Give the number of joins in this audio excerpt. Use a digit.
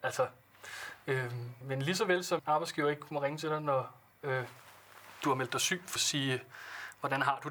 3